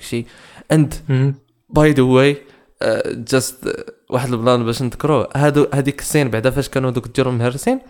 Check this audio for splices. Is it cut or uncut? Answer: uncut